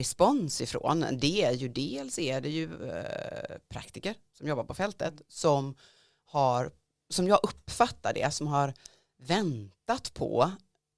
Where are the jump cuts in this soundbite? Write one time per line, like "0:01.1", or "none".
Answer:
none